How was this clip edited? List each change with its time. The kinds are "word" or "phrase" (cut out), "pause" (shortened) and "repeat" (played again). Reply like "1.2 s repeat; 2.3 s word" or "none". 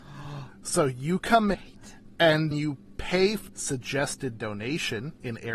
1.5 s word; 2.5 s word; 3.5 s phrase